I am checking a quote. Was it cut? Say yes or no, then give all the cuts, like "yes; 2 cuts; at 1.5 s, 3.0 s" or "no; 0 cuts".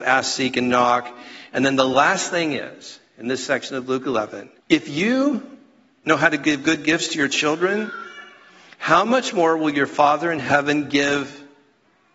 yes; 1 cut; at 4.6 s